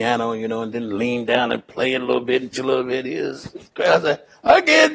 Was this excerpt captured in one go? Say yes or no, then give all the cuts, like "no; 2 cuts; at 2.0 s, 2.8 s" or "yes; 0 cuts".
no; 1 cut; at 2.5 s